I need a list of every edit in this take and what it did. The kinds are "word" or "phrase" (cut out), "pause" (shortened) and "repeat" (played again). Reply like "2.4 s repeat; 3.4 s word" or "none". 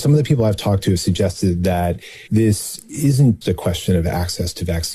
2.3 s pause; 3.4 s word